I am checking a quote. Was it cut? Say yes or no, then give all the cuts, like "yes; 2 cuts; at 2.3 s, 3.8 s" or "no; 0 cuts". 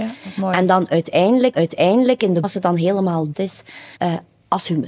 yes; 4 cuts; at 1.5 s, 2.4 s, 3.3 s, 4.0 s